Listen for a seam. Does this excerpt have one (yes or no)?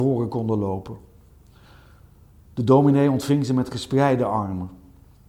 no